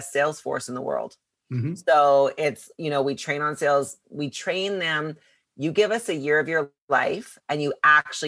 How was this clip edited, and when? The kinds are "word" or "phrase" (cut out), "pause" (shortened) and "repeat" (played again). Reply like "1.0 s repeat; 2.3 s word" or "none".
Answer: none